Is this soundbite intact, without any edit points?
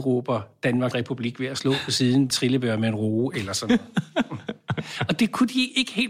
no; 2 cuts; at 0.9 s, 2.3 s

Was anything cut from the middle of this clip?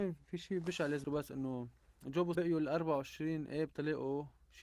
yes; 2 cuts; at 1.0 s, 2.3 s

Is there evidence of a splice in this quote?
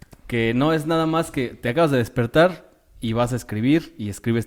no; 0 cuts

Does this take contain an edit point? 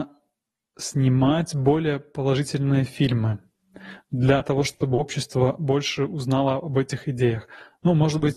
no; 0 cuts

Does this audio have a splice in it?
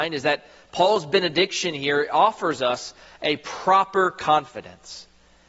no; 0 cuts

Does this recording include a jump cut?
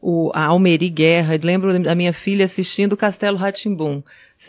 yes; 1 cut; at 1.4 s

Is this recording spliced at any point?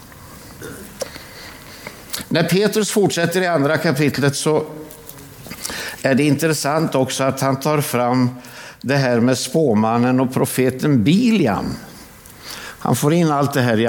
no; 0 cuts

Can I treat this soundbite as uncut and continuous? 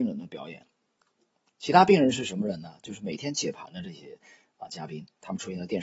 yes; 0 cuts

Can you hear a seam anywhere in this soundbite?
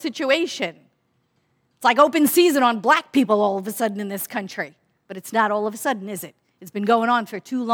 no; 0 cuts

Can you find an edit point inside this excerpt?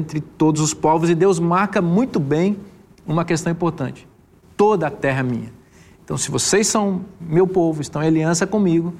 no; 0 cuts

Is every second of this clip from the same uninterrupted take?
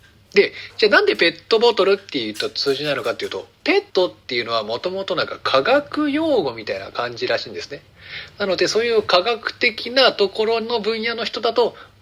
no; 1 cut; at 3.9 s

